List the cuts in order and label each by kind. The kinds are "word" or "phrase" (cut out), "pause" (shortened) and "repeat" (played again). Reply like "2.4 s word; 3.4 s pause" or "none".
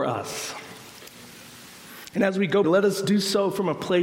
2.6 s phrase